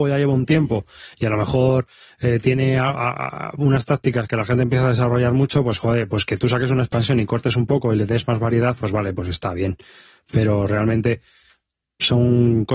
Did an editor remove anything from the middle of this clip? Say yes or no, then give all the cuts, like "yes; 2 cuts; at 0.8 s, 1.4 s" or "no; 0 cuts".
no; 0 cuts